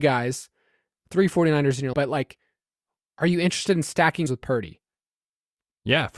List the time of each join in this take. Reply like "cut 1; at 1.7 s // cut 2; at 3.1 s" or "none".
cut 1; at 1.9 s // cut 2; at 4.3 s